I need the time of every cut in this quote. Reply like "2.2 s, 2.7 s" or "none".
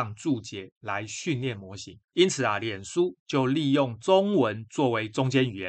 2.0 s